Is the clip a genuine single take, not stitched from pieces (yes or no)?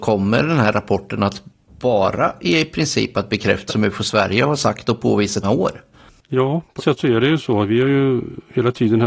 no